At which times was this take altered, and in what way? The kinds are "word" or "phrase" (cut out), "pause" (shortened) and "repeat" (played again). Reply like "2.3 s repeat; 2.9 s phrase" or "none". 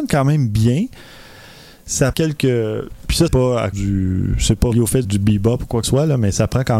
2.1 s word; 3.3 s word; 3.7 s word; 4.7 s word; 5.0 s word; 5.8 s word